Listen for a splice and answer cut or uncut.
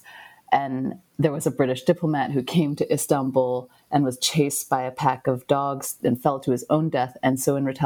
uncut